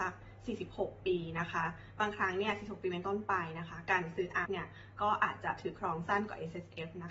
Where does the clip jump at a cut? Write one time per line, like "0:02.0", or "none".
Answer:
0:04.5

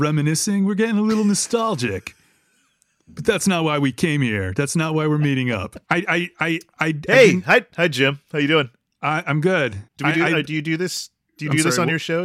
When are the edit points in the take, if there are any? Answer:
0:05.8
0:09.9

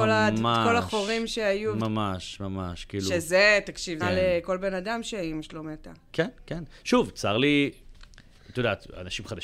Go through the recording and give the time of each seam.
0:04.0

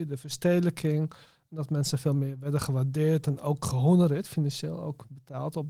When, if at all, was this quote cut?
none

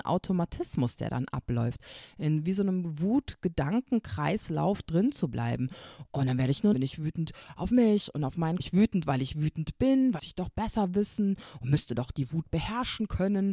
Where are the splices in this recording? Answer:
0:06.7
0:08.6
0:10.2

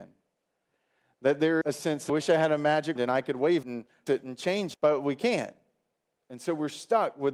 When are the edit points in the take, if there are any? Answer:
0:01.6
0:02.1
0:03.0
0:03.6
0:04.1
0:04.7

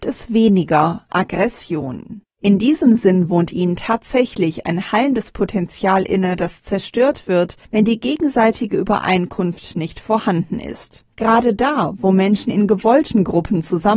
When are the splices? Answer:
0:02.3
0:07.6
0:11.1

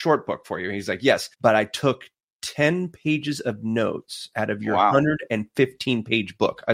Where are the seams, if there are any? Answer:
0:01.3

